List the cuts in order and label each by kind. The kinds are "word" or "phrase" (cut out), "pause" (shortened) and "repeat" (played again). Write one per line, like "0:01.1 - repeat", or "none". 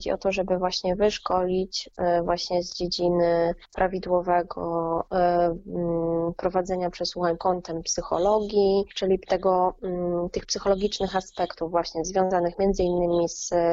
0:03.6 - pause
0:07.4 - word
0:08.9 - pause